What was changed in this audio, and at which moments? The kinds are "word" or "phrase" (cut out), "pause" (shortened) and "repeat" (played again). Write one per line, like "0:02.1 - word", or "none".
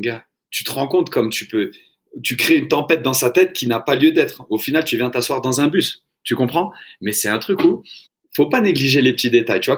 0:08.1 - pause